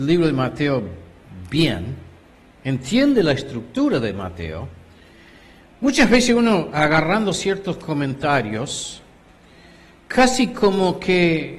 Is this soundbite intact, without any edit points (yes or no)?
yes